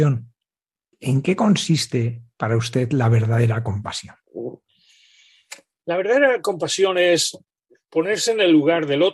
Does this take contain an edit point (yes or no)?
no